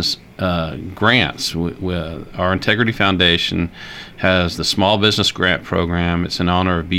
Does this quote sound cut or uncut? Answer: uncut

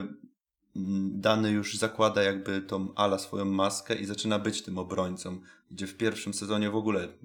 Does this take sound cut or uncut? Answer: uncut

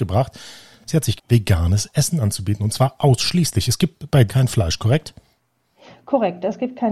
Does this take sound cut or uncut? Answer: cut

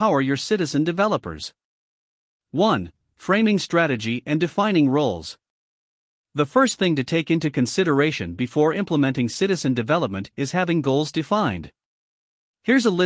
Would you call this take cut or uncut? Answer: uncut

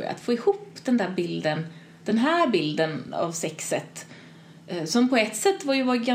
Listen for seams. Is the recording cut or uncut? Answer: uncut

